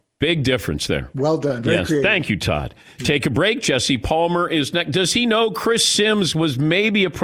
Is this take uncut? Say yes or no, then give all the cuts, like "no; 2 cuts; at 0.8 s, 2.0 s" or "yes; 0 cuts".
yes; 0 cuts